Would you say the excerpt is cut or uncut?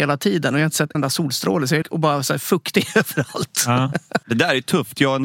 cut